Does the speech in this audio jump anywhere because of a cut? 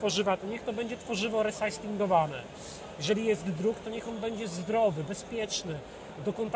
no; 0 cuts

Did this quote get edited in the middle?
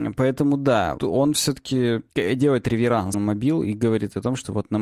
yes; 3 cuts; at 1.0 s, 2.1 s, 3.1 s

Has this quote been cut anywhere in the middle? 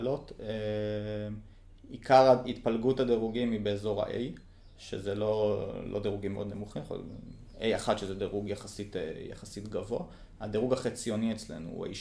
no; 0 cuts

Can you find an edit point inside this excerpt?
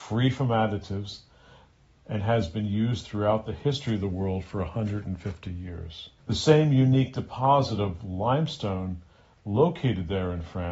yes; 1 cut; at 6.2 s

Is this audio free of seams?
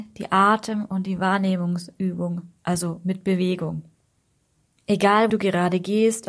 no; 1 cut; at 5.3 s

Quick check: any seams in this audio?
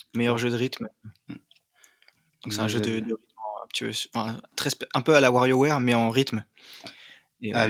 no; 0 cuts

